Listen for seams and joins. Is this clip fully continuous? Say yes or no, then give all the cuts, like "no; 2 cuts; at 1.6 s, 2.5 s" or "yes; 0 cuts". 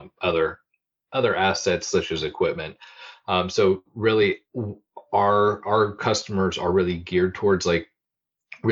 no; 1 cut; at 4.5 s